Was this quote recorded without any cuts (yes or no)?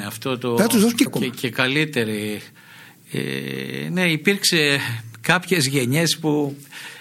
no